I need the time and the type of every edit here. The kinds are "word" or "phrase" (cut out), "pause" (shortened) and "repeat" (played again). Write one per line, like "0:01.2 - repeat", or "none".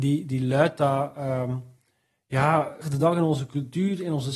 0:02.8 - phrase